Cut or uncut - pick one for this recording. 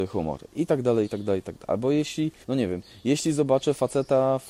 cut